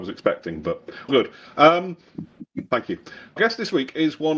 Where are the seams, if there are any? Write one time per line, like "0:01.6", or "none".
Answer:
0:01.1
0:03.4